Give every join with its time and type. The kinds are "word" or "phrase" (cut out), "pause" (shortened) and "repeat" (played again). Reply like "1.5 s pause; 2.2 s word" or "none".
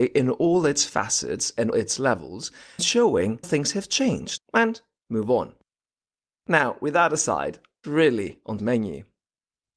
1.7 s word; 2.8 s word; 3.4 s word; 4.4 s word; 7.8 s word; 8.6 s word